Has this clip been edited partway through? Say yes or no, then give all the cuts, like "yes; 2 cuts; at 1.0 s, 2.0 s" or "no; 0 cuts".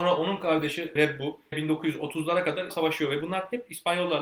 yes; 3 cuts; at 1.0 s, 1.5 s, 2.7 s